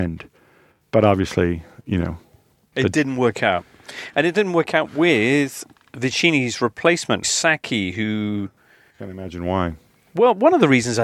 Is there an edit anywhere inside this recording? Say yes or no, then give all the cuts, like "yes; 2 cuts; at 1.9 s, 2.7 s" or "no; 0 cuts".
yes; 1 cut; at 7.2 s